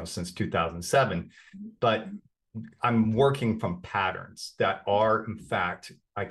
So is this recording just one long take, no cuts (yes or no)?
yes